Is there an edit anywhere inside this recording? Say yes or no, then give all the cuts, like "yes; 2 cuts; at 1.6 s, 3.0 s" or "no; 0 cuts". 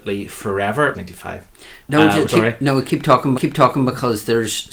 yes; 4 cuts; at 0.9 s, 1.8 s, 2.3 s, 3.3 s